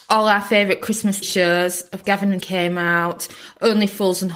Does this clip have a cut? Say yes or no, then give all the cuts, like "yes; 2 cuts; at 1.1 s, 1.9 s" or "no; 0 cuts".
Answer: yes; 3 cuts; at 1.2 s, 2.0 s, 2.4 s